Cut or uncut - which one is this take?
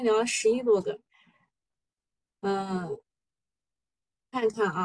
uncut